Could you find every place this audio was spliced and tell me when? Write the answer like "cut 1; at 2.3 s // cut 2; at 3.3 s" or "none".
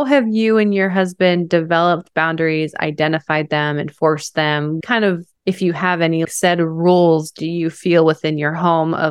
cut 1; at 4.8 s // cut 2; at 5.3 s // cut 3; at 6.2 s